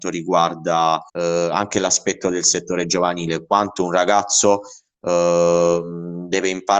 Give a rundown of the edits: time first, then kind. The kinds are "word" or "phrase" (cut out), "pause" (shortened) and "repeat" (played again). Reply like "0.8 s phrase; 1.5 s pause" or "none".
1.1 s pause